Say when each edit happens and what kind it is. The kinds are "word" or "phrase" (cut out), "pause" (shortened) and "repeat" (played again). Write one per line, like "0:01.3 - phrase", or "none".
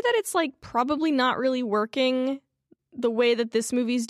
none